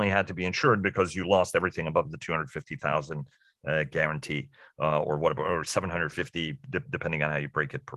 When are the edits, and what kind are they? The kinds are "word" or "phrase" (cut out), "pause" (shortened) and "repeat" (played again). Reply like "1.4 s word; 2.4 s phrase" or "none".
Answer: none